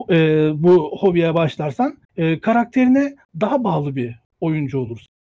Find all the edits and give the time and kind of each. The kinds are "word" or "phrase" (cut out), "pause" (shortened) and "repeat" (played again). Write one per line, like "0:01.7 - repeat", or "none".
0:02.0 - pause